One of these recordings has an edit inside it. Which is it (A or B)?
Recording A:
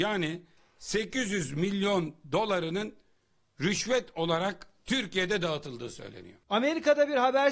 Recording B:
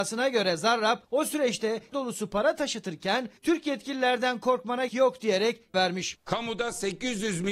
B